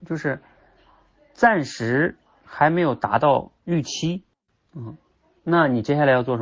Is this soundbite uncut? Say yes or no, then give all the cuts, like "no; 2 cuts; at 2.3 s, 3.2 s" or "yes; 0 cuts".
no; 1 cut; at 3.6 s